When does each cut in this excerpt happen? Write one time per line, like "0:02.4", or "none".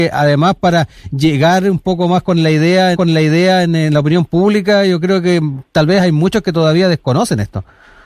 0:02.9